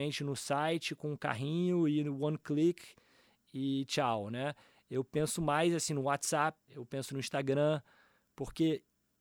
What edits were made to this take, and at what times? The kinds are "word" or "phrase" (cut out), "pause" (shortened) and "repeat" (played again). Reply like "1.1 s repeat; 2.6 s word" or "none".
6.6 s pause